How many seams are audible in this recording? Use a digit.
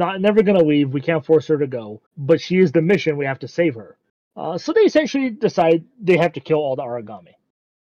2